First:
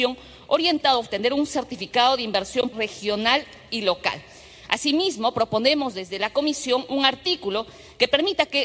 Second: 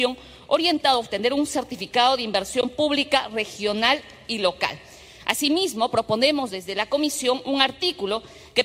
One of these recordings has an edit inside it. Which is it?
first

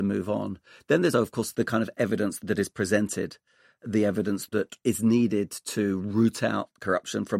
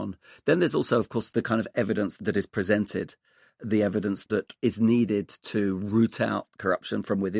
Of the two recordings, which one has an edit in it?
first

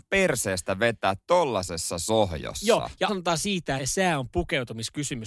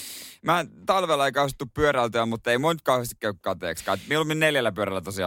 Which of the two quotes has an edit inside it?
first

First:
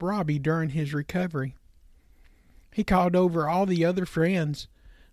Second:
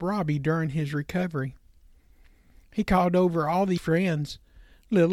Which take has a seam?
second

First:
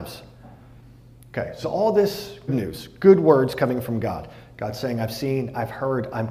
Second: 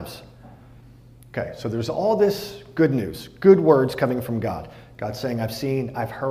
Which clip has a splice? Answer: first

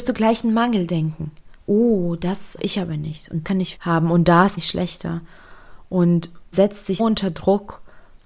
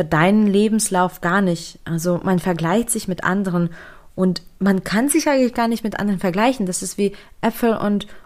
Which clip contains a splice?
first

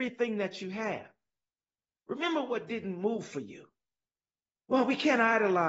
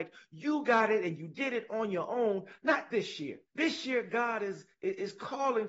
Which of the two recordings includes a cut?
second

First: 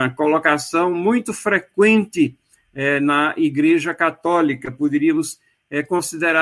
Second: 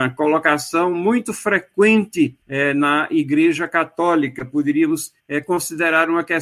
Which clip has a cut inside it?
second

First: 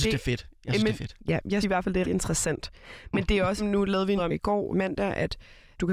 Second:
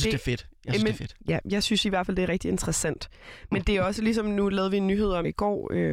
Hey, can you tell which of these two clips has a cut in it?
first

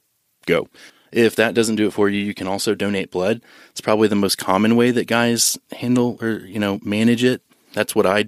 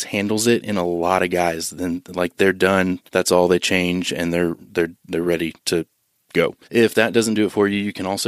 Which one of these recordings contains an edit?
second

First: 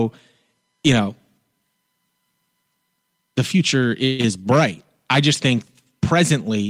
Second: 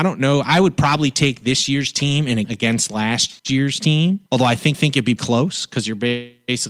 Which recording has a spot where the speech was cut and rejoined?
second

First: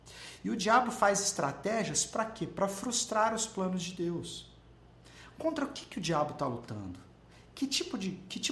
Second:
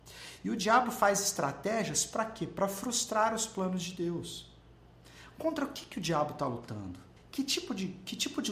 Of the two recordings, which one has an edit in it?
second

